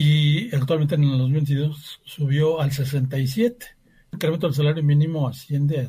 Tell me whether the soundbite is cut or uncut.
cut